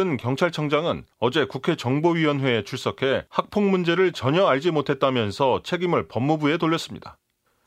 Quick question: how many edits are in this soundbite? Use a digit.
2